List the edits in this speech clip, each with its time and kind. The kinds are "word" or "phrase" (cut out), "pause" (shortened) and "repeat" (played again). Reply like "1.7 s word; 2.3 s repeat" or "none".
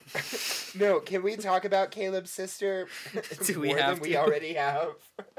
none